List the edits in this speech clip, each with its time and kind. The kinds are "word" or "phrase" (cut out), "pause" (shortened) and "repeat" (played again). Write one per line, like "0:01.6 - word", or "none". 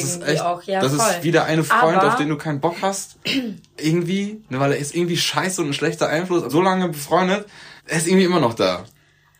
0:06.5 - phrase
0:07.8 - pause